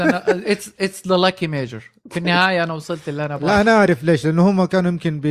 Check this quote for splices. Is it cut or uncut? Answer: uncut